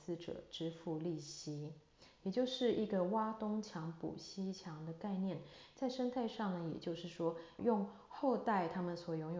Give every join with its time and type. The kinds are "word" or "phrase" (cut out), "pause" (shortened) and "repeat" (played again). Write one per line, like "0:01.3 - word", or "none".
0:07.6 - word